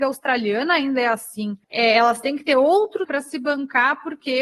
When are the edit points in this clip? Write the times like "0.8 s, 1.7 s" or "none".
1.6 s, 3.1 s